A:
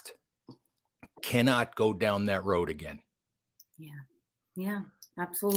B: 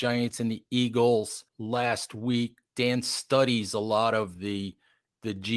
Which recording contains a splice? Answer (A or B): B